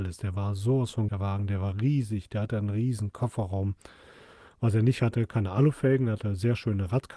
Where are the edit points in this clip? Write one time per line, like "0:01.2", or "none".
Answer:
0:01.1